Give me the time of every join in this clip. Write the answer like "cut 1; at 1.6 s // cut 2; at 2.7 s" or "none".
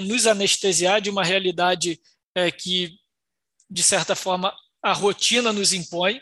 none

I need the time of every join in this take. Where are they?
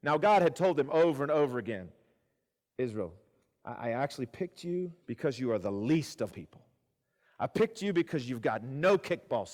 cut 1; at 5.0 s // cut 2; at 6.3 s

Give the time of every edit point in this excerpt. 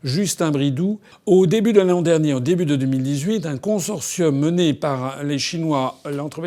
none

